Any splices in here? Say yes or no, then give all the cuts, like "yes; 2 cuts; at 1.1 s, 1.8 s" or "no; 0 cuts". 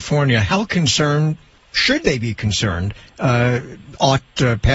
no; 0 cuts